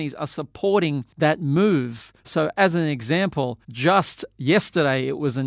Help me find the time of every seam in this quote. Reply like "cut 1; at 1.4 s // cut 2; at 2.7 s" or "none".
cut 1; at 1.1 s // cut 2; at 2.2 s // cut 3; at 3.6 s